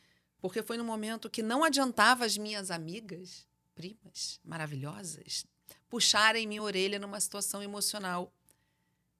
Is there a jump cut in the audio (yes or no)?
no